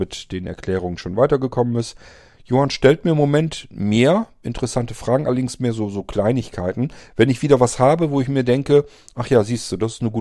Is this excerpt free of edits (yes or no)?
yes